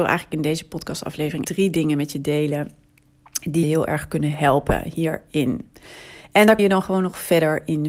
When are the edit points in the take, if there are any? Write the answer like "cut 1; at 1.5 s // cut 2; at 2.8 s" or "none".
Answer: cut 1; at 1.4 s // cut 2; at 3.6 s // cut 3; at 6.6 s

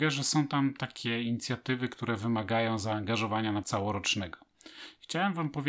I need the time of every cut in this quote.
cut 1; at 3.6 s

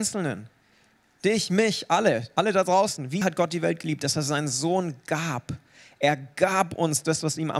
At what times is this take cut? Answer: cut 1; at 3.2 s

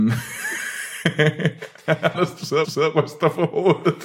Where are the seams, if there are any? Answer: cut 1; at 2.1 s // cut 2; at 2.6 s

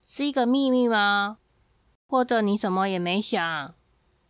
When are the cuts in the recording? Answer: none

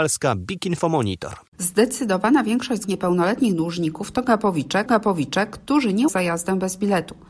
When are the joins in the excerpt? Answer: cut 1; at 1.5 s // cut 2; at 2.8 s // cut 3; at 4.9 s // cut 4; at 6.1 s

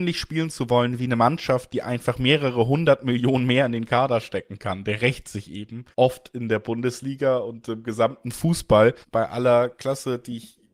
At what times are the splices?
cut 1; at 5.9 s // cut 2; at 9.0 s

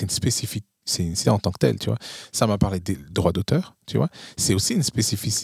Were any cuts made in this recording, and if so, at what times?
cut 1; at 1.2 s // cut 2; at 3.1 s

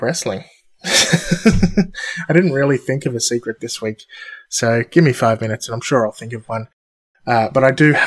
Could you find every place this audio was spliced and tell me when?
none

